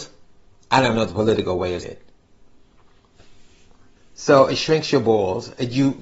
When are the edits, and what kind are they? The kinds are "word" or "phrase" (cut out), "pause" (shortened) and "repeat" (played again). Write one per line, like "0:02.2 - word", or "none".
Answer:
0:01.8 - word